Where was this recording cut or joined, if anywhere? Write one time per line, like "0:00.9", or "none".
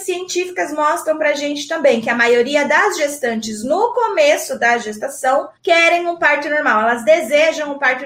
0:05.6